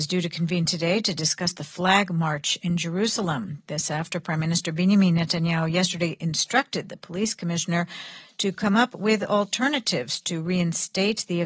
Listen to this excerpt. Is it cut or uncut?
uncut